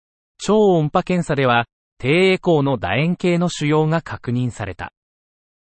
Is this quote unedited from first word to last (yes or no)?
yes